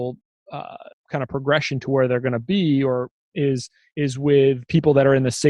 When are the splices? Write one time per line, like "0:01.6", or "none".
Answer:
0:00.9
0:03.3